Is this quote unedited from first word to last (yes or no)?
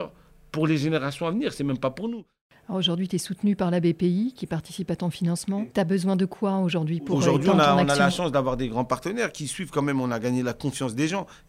yes